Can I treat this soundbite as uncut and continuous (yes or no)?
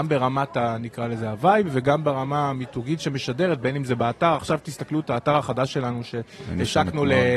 yes